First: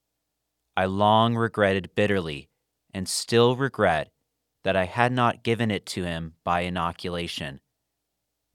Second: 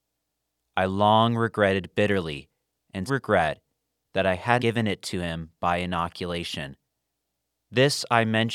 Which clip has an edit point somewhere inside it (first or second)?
second